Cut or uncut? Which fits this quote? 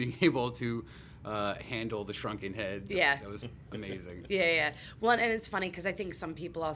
uncut